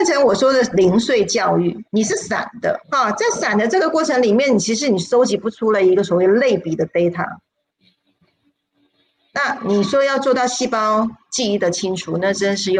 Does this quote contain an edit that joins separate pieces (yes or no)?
yes